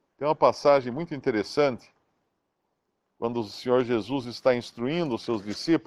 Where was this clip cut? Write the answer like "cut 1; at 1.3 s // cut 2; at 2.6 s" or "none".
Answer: none